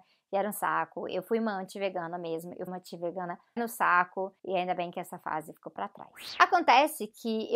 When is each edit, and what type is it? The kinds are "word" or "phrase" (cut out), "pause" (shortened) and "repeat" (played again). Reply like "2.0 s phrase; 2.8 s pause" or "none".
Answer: 2.7 s word; 3.6 s word; 4.4 s pause